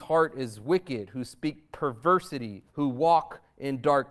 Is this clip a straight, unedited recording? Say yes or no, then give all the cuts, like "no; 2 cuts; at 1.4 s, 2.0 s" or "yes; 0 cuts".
no; 1 cut; at 2.7 s